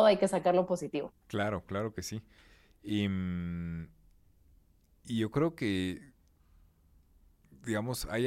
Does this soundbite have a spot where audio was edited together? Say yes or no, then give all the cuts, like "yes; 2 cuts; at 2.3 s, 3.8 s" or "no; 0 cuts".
yes; 1 cut; at 1.2 s